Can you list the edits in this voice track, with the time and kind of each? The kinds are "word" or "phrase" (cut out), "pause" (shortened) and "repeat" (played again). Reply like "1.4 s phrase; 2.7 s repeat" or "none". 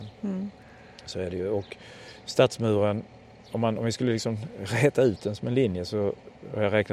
none